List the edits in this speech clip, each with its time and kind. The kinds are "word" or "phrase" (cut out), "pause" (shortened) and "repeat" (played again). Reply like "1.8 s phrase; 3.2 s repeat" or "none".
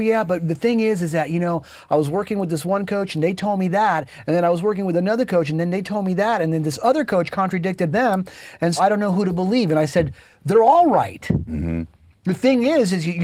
7.9 s phrase; 8.8 s word